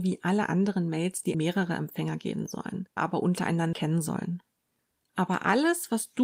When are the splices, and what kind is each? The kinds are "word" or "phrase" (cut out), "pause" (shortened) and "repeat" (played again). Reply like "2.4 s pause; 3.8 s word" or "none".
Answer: 1.3 s word; 3.0 s phrase; 3.7 s word